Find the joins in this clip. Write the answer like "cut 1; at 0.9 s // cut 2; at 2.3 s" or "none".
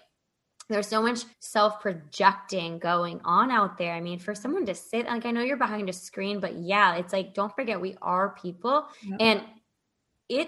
cut 1; at 1.3 s // cut 2; at 8.9 s

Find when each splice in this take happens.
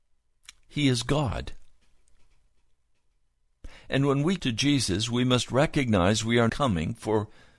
cut 1; at 4.4 s // cut 2; at 6.5 s

